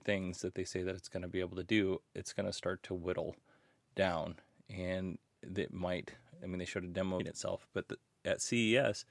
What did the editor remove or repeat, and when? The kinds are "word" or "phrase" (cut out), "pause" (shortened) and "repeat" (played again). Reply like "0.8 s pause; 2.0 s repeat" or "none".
7.2 s phrase